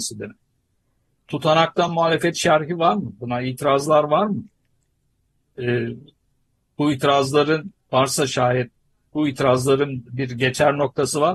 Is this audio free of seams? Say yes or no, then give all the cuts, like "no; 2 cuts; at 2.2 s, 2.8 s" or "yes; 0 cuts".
yes; 0 cuts